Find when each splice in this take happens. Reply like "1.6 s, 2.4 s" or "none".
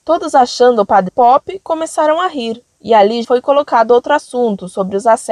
1.1 s, 3.2 s

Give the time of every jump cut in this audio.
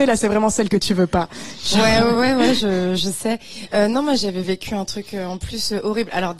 none

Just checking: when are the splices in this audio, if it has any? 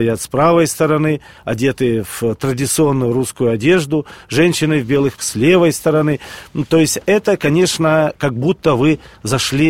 5.2 s

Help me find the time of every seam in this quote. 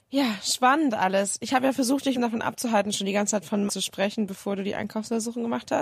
2.2 s, 3.7 s

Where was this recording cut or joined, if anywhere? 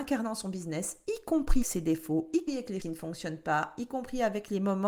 1.6 s, 2.5 s, 2.8 s

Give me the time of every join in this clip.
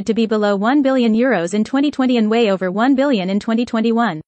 none

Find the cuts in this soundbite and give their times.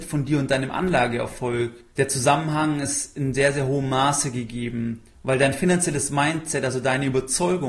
1.9 s, 5.1 s

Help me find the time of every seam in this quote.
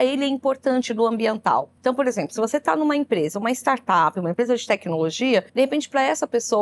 1.8 s, 5.5 s

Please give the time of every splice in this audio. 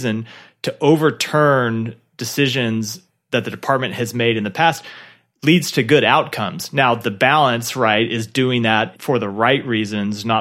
none

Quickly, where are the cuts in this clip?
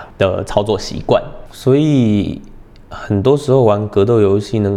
none

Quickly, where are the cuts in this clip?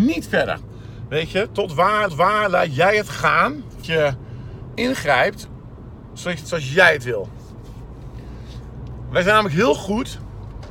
2.1 s, 3.8 s, 4.8 s, 6.4 s

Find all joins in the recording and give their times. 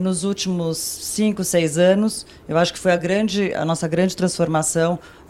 none

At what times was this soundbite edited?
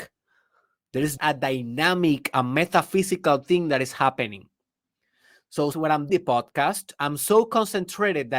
1.2 s, 5.7 s, 6.1 s

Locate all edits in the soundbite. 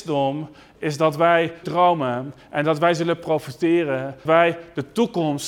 1.6 s, 4.3 s

